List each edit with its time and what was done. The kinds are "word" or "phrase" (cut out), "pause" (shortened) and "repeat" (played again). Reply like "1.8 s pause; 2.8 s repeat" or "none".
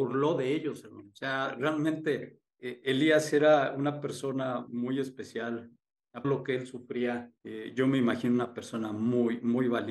2.6 s word; 4.7 s word; 6.2 s phrase; 7.4 s pause